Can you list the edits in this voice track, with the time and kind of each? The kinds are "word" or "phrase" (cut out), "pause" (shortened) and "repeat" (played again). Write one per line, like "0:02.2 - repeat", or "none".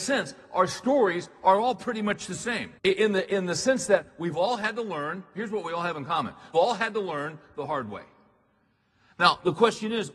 0:02.8 - pause
0:06.5 - word